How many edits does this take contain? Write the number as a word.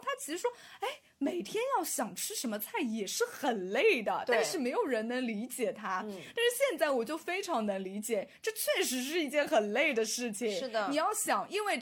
zero